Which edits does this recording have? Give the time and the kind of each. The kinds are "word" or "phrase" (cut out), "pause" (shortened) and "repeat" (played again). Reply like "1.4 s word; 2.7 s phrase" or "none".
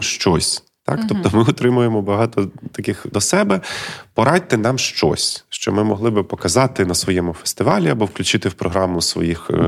3.1 s phrase